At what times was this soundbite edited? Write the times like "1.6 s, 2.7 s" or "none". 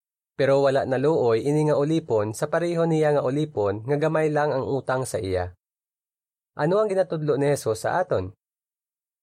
none